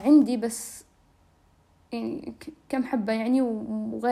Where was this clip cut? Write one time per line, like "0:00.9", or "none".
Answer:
none